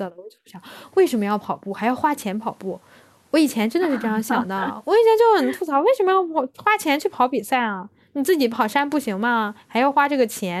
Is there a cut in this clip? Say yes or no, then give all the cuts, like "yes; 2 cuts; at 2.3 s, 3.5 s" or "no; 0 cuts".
no; 0 cuts